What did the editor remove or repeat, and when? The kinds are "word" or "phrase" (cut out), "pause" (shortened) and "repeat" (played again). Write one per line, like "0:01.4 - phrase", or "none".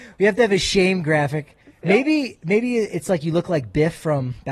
0:01.6 - pause